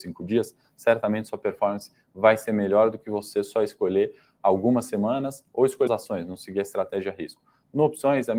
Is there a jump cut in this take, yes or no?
yes